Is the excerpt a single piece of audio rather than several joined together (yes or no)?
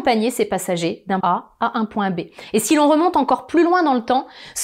no